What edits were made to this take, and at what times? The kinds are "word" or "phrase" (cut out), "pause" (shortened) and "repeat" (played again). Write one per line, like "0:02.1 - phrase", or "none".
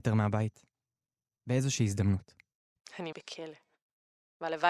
0:03.1 - word

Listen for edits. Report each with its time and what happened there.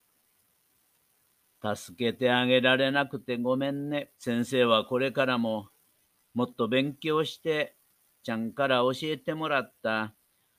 0:04.1 - pause
0:08.2 - word

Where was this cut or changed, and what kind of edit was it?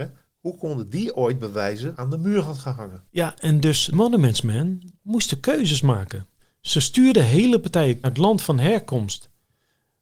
0:01.9 - phrase
0:03.1 - pause
0:03.9 - word
0:06.4 - pause
0:08.0 - phrase

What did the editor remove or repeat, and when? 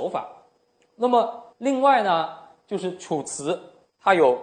0:01.5 - pause

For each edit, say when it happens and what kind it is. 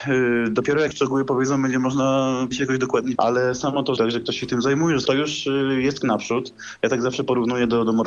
0:00.9 - word
0:02.5 - word
0:03.1 - word
0:04.0 - phrase
0:05.1 - phrase
0:06.0 - word

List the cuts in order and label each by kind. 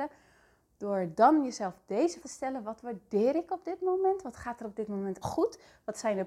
0:02.2 - word
0:05.2 - word

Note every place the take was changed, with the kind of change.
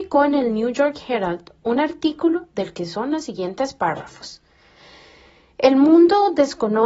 none

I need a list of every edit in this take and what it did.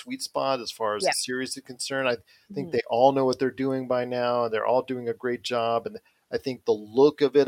none

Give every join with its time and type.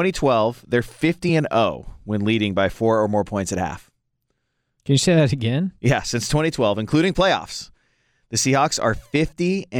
none

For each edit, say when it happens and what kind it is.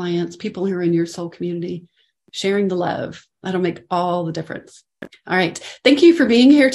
none

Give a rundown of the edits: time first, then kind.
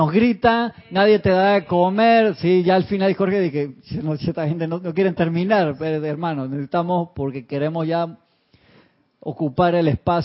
none

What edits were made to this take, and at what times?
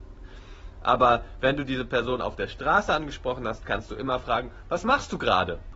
none

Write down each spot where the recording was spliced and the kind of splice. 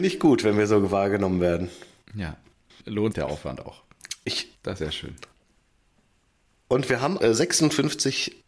0:02.8 - word
0:03.1 - word
0:04.8 - word
0:07.2 - word

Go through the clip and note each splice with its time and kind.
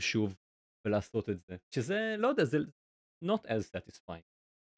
0:01.6 - pause

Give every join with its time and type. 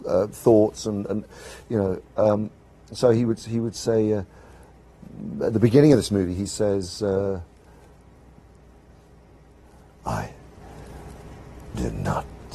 none

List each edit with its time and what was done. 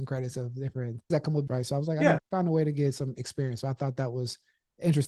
0:01.1 - word
0:01.5 - word
0:02.2 - word

